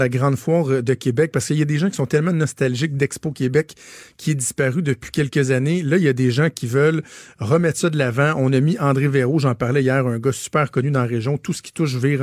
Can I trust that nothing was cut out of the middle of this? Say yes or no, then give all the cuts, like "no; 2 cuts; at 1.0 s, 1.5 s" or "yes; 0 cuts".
yes; 0 cuts